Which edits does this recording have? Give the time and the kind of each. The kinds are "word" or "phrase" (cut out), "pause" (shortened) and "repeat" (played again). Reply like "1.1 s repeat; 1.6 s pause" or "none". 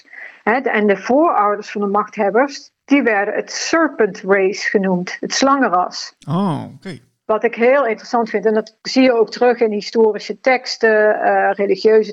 none